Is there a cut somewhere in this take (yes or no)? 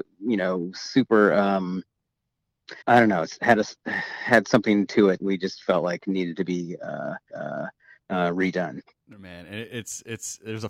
yes